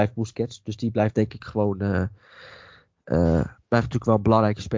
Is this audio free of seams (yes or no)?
yes